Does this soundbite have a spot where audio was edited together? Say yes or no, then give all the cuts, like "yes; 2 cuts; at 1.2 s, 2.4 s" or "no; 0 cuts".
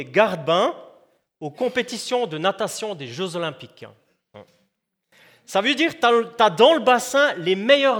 no; 0 cuts